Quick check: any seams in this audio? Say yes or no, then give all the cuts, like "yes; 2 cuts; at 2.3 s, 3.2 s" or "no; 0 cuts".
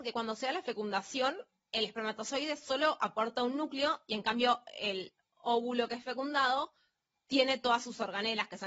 no; 0 cuts